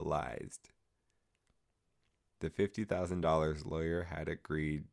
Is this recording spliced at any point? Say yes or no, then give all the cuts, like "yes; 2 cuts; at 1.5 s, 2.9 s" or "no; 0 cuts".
no; 0 cuts